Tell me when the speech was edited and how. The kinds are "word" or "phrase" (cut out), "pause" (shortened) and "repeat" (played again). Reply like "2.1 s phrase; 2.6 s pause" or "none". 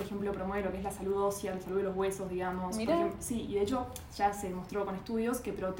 none